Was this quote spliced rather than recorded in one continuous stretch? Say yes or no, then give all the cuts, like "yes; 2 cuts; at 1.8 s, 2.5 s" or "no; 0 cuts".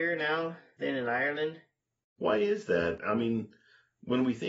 no; 0 cuts